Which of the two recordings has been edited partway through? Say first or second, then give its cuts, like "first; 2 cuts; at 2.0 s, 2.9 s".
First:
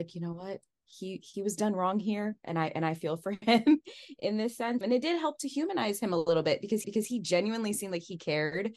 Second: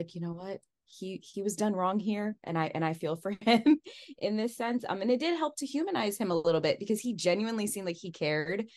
first; 2 cuts; at 4.8 s, 6.8 s